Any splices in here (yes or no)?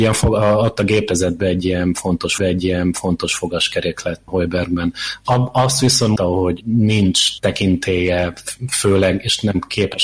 yes